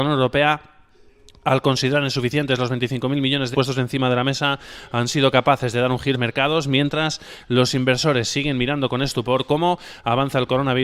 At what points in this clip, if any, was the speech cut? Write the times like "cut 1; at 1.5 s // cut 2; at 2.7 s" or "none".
cut 1; at 3.5 s // cut 2; at 6.1 s